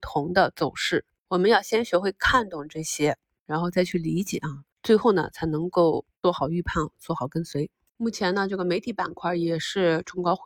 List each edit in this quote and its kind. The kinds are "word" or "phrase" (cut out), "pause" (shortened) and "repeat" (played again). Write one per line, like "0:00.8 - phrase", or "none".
0:04.7 - pause